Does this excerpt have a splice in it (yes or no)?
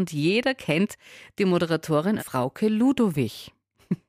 yes